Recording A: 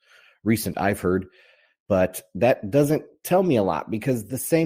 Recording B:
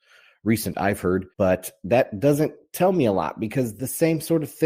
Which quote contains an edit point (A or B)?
B